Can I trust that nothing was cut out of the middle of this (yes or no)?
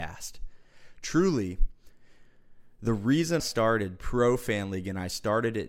no